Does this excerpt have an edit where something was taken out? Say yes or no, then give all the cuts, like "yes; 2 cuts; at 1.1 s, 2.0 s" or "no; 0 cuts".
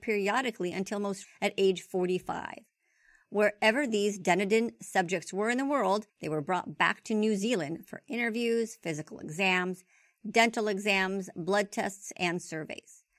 yes; 2 cuts; at 1.2 s, 6.1 s